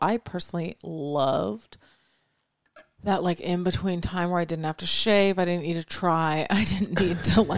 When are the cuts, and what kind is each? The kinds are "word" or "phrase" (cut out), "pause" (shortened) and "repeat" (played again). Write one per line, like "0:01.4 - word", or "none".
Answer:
none

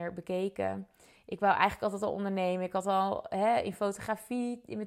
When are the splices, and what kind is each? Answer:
none

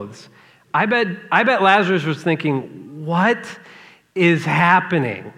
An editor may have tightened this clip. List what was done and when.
none

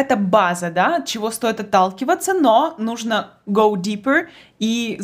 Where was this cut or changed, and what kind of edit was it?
none

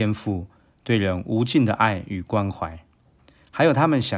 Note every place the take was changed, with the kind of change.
none

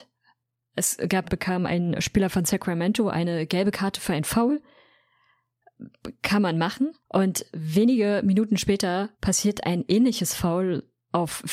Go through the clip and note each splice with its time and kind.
0:01.2 - phrase
0:07.0 - pause
0:09.1 - pause

